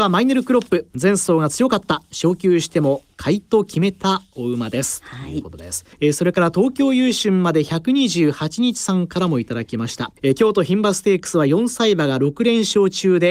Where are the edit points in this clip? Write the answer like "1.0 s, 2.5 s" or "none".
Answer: 5.9 s, 10.2 s